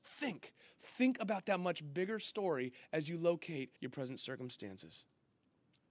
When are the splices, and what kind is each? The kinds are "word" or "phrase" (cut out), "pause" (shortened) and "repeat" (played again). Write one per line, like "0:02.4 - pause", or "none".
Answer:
0:03.8 - pause